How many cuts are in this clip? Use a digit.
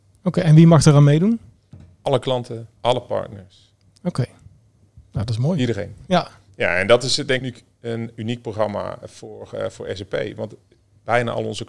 3